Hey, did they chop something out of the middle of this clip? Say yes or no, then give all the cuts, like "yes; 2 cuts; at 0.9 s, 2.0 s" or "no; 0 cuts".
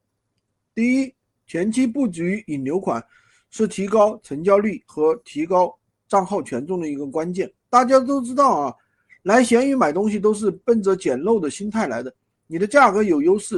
yes; 2 cuts; at 7.6 s, 10.6 s